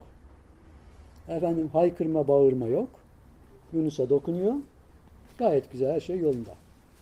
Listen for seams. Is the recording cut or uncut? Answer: uncut